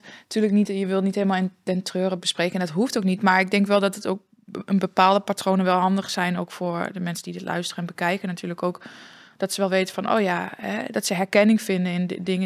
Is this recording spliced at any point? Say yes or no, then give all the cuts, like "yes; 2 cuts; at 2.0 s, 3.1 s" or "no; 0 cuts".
no; 0 cuts